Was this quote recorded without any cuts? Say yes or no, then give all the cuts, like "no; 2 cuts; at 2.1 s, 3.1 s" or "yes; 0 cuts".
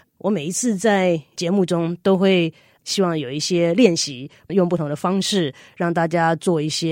yes; 0 cuts